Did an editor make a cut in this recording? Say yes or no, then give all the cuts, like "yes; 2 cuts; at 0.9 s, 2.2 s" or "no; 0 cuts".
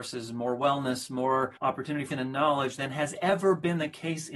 yes; 2 cuts; at 1.6 s, 2.1 s